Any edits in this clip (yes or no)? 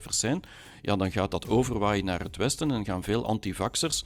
no